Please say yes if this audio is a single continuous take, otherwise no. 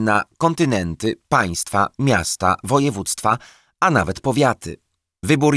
yes